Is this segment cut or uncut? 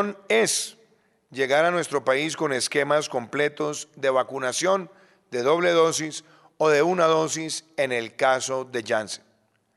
uncut